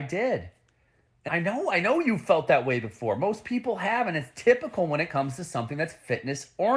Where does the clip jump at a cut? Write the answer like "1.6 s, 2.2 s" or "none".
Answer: 1.3 s